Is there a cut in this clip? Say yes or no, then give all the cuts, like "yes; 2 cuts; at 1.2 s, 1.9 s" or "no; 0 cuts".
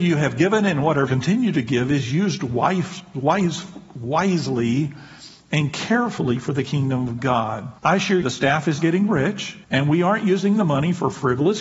yes; 5 cuts; at 1.1 s, 7.8 s, 8.2 s, 8.8 s, 9.6 s